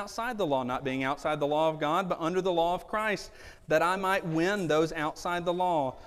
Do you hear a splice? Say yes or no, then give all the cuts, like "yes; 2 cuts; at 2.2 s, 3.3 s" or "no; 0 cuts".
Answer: no; 0 cuts